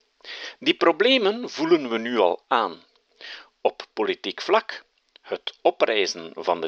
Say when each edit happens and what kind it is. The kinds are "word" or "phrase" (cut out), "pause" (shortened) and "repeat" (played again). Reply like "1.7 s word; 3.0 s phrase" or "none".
none